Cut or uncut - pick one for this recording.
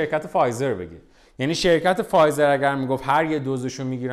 uncut